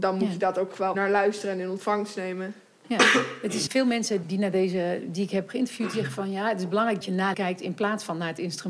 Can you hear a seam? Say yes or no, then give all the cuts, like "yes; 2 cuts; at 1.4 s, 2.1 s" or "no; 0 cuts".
yes; 5 cuts; at 0.9 s, 3.7 s, 4.2 s, 7.0 s, 7.3 s